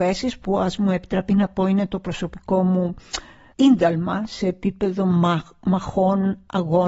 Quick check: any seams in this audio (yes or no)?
no